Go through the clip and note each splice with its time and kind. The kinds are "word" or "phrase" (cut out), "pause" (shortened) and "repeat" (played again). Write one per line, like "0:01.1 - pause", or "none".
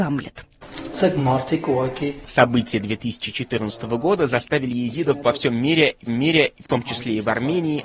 0:06.1 - repeat